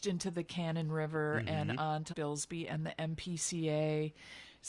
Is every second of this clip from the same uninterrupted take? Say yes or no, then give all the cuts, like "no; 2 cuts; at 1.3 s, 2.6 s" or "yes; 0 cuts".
no; 1 cut; at 2.1 s